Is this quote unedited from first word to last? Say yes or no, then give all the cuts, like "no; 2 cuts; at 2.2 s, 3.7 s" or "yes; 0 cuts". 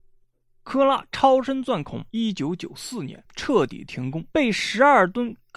no; 2 cuts; at 2.1 s, 4.3 s